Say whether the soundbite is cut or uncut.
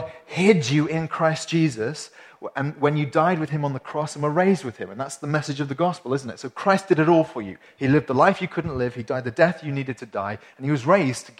uncut